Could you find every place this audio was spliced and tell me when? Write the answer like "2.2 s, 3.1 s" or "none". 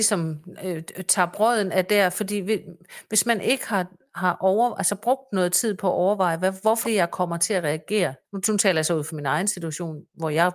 6.8 s, 8.2 s